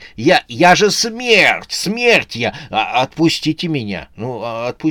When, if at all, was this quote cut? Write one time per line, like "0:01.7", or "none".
none